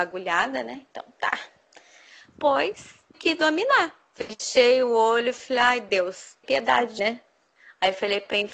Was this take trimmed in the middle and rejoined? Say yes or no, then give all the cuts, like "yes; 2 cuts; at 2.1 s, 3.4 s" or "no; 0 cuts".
yes; 3 cuts; at 3.1 s, 6.4 s, 7.0 s